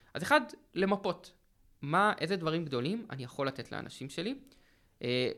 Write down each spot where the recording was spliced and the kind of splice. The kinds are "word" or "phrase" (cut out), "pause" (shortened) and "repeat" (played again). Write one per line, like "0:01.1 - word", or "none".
none